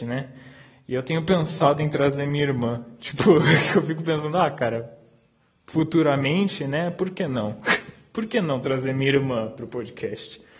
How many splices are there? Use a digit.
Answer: 0